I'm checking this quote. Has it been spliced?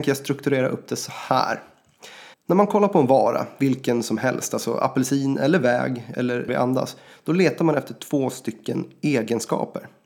yes; 2 cuts; at 2.3 s, 6.5 s

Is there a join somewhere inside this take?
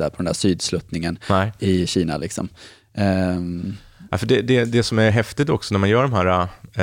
no; 0 cuts

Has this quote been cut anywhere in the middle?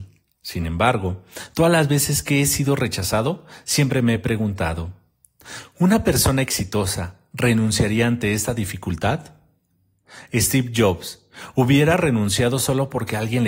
no; 0 cuts

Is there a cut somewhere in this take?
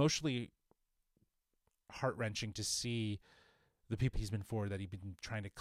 yes; 2 cuts; at 4.1 s, 4.4 s

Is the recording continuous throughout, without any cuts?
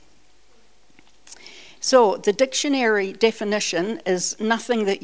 yes; 0 cuts

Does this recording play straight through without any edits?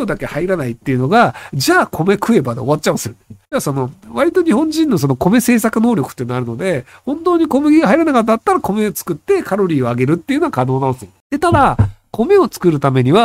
no; 1 cut; at 3.4 s

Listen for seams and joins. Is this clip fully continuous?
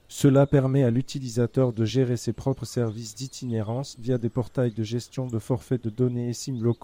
yes; 0 cuts

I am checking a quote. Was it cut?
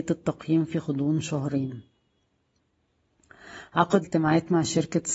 yes; 1 cut; at 4.0 s

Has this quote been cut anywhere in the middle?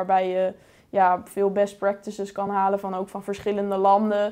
no; 0 cuts

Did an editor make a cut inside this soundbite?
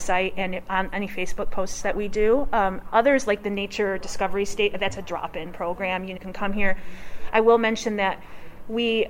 yes; 1 cut; at 6.2 s

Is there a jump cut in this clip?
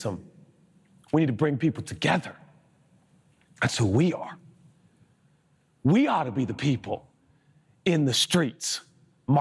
no; 0 cuts

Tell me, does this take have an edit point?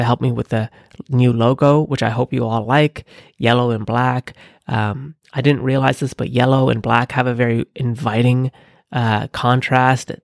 no; 0 cuts

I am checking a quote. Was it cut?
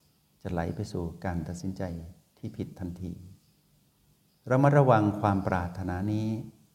no; 0 cuts

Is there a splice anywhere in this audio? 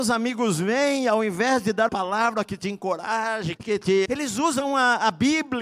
yes; 3 cuts; at 1.9 s, 3.6 s, 4.1 s

